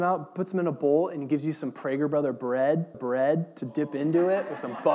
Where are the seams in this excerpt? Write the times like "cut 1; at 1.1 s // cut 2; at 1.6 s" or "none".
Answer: cut 1; at 2.9 s